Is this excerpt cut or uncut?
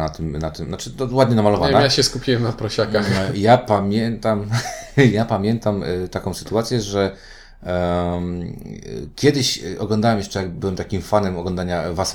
uncut